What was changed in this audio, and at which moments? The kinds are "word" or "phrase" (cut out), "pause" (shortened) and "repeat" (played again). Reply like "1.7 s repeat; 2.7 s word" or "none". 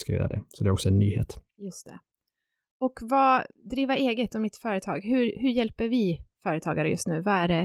none